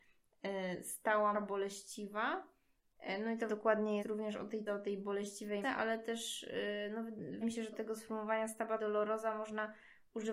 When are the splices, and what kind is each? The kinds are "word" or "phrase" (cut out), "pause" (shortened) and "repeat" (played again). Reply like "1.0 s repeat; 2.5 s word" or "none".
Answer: 1.3 s word; 3.5 s word; 4.0 s word; 4.7 s word; 5.6 s word; 7.4 s word; 7.7 s word; 8.8 s word